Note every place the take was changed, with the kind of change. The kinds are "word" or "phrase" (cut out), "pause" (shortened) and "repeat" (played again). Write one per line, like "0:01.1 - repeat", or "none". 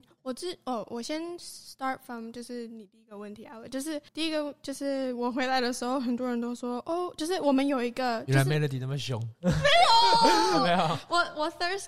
0:04.1 - pause

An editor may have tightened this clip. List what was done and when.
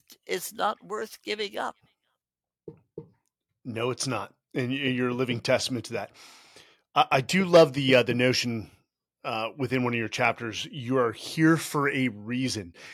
none

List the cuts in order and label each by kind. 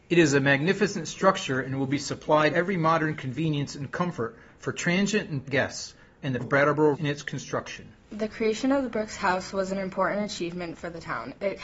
0:02.5 - word
0:05.4 - word
0:06.4 - word
0:06.9 - word

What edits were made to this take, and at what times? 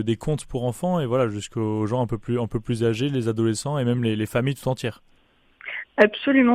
none

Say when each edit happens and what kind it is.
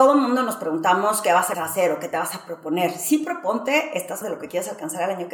0:01.5 - word
0:04.2 - word

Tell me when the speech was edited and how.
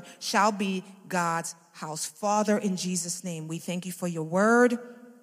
none

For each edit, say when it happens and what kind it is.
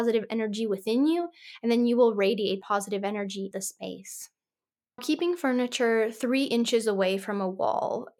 0:02.6 - word
0:03.5 - word
0:05.0 - word

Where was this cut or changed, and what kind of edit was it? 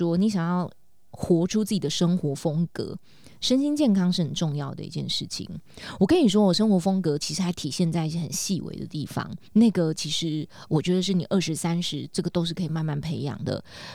0:09.5 - pause

